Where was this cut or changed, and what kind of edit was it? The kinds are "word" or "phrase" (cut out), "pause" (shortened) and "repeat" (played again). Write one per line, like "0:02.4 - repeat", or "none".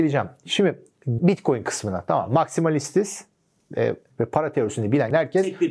0:01.2 - word
0:04.1 - word